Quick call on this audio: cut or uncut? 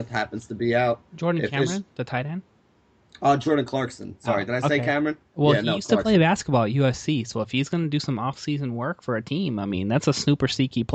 uncut